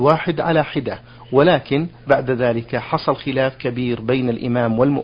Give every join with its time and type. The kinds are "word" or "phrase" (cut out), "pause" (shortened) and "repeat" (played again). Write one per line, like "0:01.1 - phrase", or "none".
none